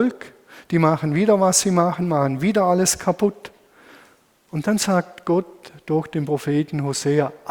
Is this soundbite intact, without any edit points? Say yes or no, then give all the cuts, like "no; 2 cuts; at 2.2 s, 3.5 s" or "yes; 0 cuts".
yes; 0 cuts